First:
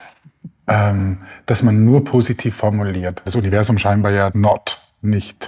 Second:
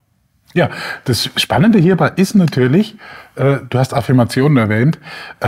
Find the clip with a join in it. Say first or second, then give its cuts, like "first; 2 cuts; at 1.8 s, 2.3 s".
first; 2 cuts; at 3.3 s, 4.3 s